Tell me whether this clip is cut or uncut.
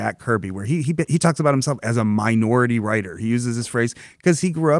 uncut